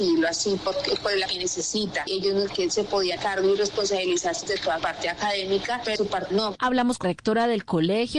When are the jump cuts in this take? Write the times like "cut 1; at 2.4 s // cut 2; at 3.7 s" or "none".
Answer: cut 1; at 1.3 s // cut 2; at 2.5 s // cut 3; at 3.2 s // cut 4; at 4.5 s // cut 5; at 4.8 s // cut 6; at 6.0 s // cut 7; at 6.3 s // cut 8; at 7.0 s